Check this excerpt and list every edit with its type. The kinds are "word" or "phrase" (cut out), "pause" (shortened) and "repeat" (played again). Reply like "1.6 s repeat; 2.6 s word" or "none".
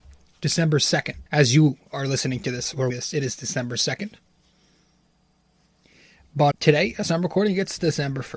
1.3 s pause; 2.9 s word; 6.5 s word

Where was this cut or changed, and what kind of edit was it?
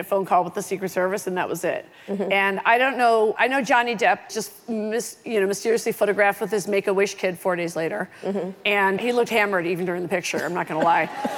3.4 s word; 4.3 s word; 9.0 s word

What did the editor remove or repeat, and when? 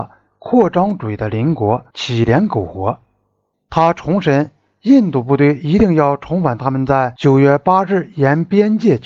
none

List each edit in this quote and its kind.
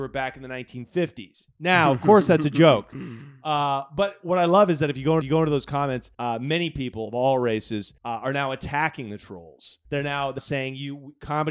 5.2 s repeat; 6.1 s pause; 8.0 s pause; 9.8 s pause; 10.4 s word

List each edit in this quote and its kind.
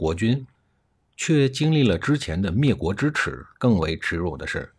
3.5 s pause

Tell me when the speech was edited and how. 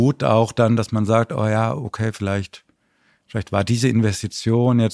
none

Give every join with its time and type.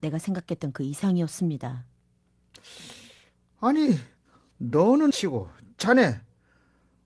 5.1 s word

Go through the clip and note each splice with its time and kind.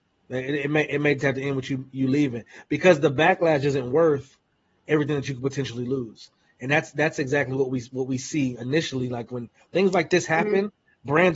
none

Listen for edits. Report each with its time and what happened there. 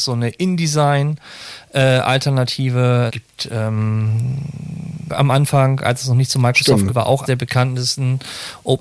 3.1 s word; 5.1 s word; 6.9 s word; 7.2 s word

